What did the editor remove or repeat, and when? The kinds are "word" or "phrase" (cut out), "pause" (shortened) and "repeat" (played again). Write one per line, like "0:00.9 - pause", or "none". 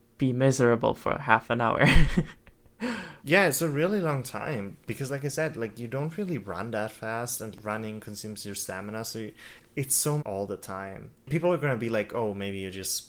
0:03.2 - pause
0:10.2 - phrase
0:11.1 - pause